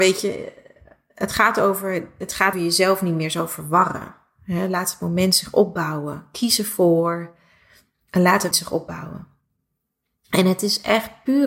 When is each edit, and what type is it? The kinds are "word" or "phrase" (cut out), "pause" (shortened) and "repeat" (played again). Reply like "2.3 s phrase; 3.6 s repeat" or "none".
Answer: 2.5 s word; 8.5 s word